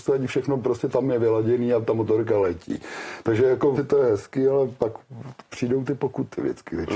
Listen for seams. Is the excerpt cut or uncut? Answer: cut